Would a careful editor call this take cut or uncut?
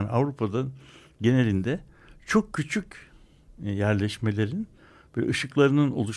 uncut